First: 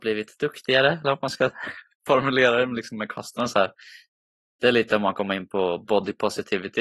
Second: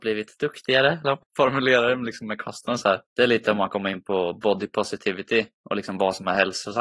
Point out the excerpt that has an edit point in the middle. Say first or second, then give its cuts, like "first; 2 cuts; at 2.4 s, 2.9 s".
second; 2 cuts; at 1.2 s, 3.1 s